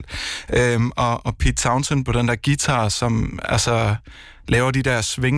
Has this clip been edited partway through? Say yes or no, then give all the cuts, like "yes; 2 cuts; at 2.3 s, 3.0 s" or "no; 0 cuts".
no; 0 cuts